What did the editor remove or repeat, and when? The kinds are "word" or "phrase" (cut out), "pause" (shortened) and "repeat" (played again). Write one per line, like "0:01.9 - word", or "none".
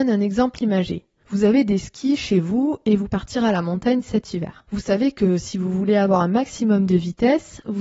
0:03.1 - phrase
0:04.7 - pause

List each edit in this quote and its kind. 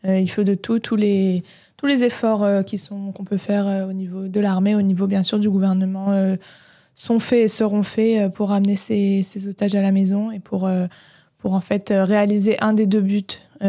none

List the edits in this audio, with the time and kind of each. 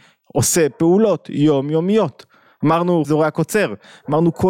0:03.0 - word

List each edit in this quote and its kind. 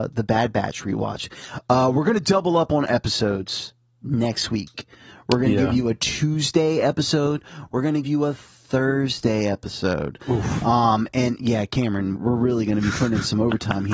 0:08.0 - word
0:12.2 - word

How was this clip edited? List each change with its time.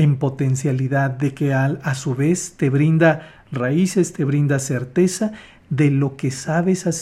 none

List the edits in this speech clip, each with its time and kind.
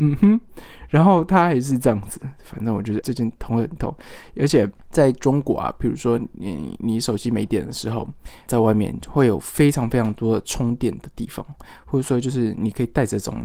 0:03.0 - word
0:04.8 - pause
0:08.5 - word

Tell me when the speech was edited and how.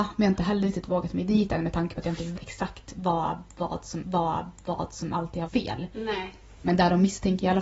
0:02.4 - word
0:04.0 - repeat
0:05.5 - word

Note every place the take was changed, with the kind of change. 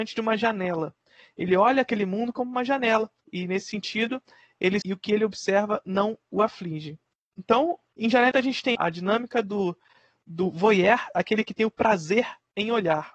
0:03.2 - pause
0:04.8 - phrase
0:08.3 - word
0:08.7 - phrase

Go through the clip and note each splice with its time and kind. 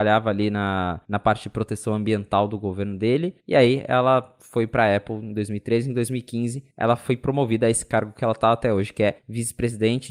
0:01.0 - pause
0:03.4 - pause
0:06.7 - pause
0:09.2 - pause

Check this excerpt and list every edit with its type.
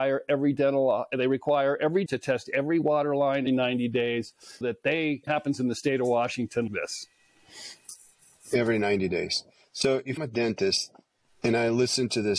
0:02.1 - word
0:03.5 - word
0:04.6 - word
0:05.3 - word
0:06.7 - word
0:10.2 - word

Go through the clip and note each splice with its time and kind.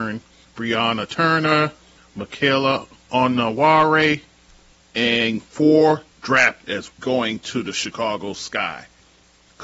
0:06.6 - word
0:06.9 - word

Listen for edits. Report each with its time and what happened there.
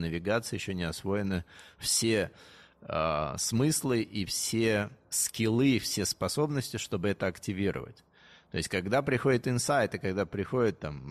none

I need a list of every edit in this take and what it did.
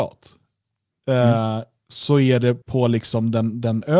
0:02.6 - pause

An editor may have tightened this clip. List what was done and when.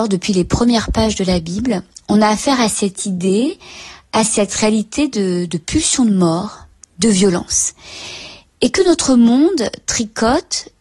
none

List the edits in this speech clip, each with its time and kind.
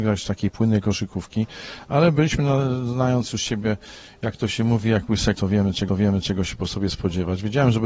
0:05.3 - word
0:05.9 - repeat

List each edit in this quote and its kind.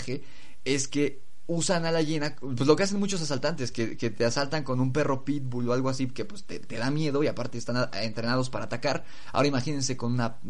none

